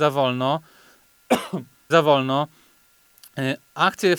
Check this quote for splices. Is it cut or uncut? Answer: cut